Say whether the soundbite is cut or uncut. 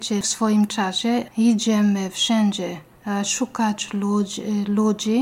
cut